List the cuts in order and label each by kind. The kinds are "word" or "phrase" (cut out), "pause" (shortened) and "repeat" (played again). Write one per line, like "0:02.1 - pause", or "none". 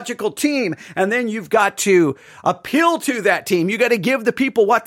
none